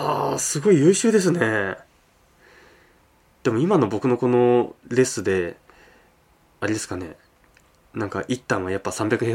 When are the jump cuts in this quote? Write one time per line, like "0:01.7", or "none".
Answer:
none